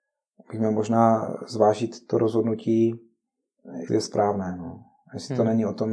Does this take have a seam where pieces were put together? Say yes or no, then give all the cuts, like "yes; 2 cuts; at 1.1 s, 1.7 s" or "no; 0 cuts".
yes; 1 cut; at 3.9 s